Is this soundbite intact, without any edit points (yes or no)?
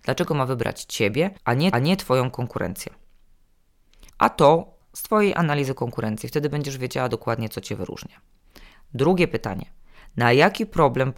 no